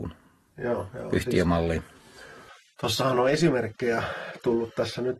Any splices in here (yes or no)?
no